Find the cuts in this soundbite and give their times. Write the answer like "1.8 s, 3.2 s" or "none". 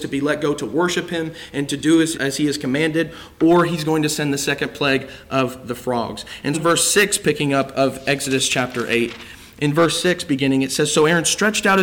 2.1 s, 6.5 s